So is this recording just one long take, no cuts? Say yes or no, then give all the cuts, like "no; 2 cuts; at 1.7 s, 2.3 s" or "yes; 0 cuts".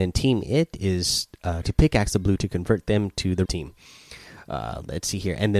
no; 3 cuts; at 1.6 s, 2.4 s, 3.5 s